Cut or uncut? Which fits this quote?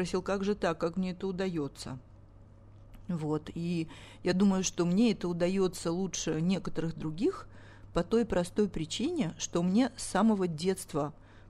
uncut